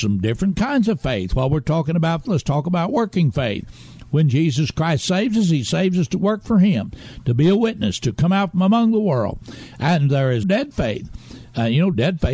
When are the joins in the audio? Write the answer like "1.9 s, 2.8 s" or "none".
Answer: 2.2 s, 10.4 s

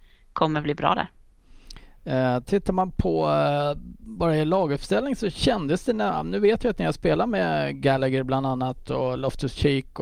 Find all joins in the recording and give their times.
none

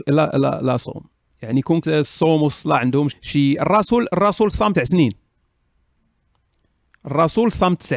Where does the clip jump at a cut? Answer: 1.8 s, 3.1 s, 4.7 s

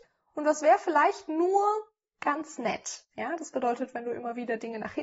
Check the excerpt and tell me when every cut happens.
none

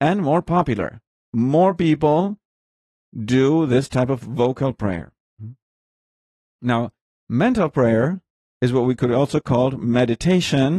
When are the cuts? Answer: none

